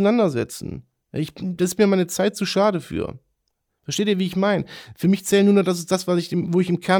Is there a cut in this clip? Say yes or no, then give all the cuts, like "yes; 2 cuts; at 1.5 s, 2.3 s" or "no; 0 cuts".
no; 0 cuts